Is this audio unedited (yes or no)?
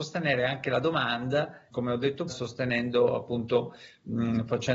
no